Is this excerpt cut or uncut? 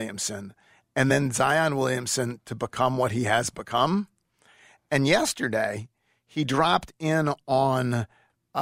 uncut